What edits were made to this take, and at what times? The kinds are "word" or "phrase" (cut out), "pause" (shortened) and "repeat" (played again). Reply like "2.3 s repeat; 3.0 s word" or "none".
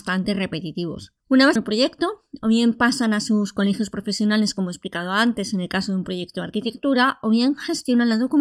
1.2 s pause; 1.6 s word